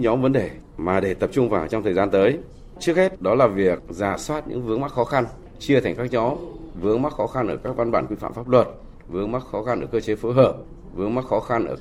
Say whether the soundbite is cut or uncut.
uncut